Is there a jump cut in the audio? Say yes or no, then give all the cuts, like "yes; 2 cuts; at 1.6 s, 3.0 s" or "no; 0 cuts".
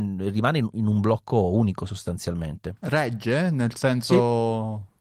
no; 0 cuts